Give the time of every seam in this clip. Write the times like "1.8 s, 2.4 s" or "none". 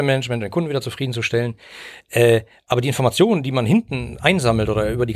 none